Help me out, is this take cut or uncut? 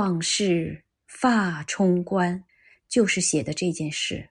cut